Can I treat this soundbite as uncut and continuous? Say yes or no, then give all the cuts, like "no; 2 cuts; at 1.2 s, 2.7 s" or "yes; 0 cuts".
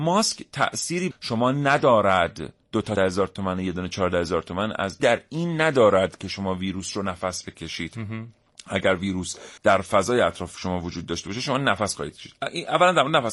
no; 5 cuts; at 1.1 s, 2.6 s, 3.0 s, 5.0 s, 9.6 s